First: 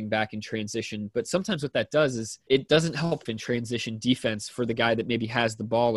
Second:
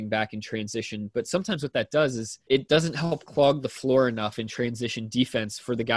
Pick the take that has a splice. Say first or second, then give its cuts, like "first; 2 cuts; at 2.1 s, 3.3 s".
first; 1 cut; at 3.3 s